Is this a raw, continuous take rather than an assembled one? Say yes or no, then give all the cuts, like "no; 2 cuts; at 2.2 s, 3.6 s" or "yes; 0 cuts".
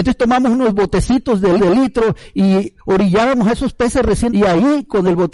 no; 2 cuts; at 1.6 s, 4.3 s